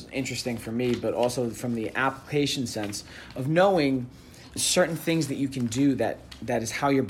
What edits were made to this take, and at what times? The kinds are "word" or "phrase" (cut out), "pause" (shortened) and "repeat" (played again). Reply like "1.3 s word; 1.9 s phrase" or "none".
4.6 s word